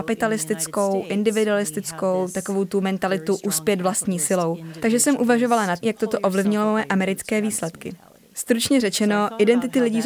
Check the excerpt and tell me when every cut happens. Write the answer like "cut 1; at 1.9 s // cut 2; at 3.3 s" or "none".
cut 1; at 5.8 s